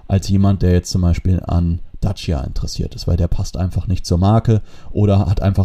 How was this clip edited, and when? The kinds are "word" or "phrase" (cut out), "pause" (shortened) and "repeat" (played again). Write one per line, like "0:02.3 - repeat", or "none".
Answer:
none